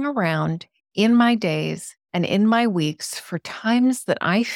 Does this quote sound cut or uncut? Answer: uncut